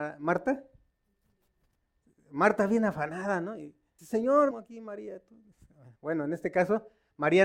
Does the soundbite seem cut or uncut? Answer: cut